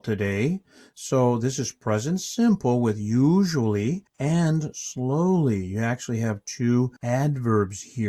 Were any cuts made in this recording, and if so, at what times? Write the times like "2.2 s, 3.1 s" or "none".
4.1 s, 7.0 s